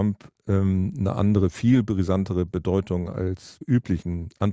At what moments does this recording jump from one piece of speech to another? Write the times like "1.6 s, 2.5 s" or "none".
3.6 s